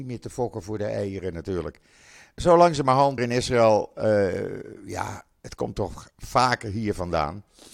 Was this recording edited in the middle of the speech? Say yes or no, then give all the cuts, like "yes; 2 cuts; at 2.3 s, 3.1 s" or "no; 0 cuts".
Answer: yes; 1 cut; at 3.2 s